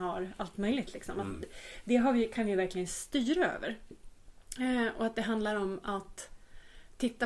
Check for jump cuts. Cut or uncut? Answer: uncut